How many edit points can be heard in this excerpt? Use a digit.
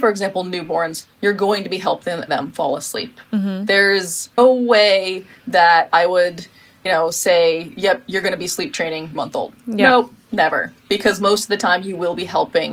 4